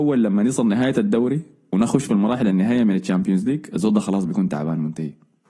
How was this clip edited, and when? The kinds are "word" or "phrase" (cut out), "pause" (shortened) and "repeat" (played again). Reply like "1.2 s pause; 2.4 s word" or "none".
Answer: none